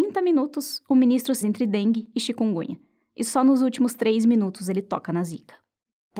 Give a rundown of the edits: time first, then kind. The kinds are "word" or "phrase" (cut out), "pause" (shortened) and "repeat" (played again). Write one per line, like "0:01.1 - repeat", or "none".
0:01.4 - word